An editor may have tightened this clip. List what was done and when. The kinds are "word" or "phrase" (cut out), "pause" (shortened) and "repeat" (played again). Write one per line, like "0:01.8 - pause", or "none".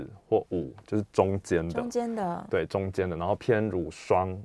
none